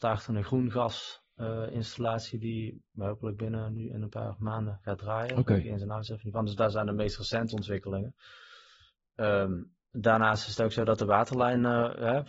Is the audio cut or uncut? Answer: uncut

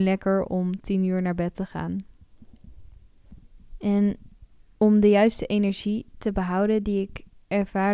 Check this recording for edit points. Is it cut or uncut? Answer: uncut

